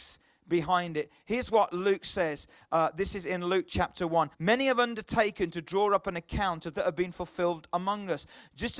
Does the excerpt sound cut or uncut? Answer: cut